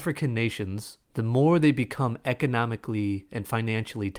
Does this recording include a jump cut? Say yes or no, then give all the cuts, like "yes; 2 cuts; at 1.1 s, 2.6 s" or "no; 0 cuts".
yes; 1 cut; at 1.0 s